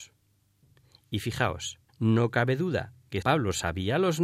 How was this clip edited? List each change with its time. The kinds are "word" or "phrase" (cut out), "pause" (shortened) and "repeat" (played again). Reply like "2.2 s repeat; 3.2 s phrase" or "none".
1.9 s pause; 3.2 s word